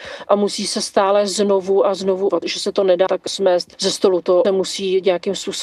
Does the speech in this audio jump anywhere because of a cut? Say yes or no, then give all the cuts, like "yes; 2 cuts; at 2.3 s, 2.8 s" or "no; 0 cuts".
yes; 3 cuts; at 2.3 s, 3.1 s, 4.4 s